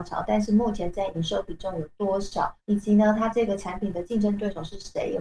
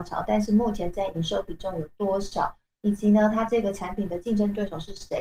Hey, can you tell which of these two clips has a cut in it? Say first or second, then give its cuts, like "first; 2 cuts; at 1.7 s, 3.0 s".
first; 1 cut; at 2.6 s